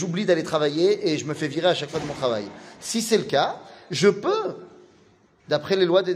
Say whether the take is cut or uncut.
uncut